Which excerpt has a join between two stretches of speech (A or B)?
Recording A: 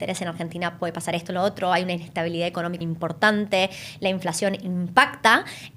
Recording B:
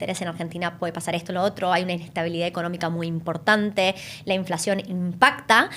A